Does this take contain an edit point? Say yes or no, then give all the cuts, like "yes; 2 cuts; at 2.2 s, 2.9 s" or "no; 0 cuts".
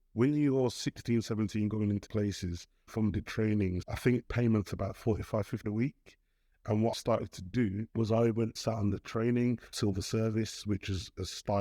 yes; 9 cuts; at 2.1 s, 2.9 s, 3.8 s, 4.2 s, 5.6 s, 6.9 s, 7.9 s, 8.6 s, 9.7 s